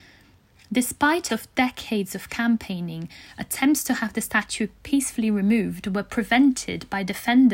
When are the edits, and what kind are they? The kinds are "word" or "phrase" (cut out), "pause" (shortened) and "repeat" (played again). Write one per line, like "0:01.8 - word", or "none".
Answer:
0:01.3 - word
0:04.8 - word